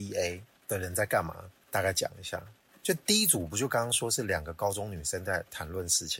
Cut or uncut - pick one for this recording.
cut